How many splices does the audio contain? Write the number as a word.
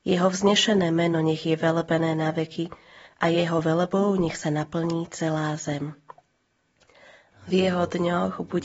zero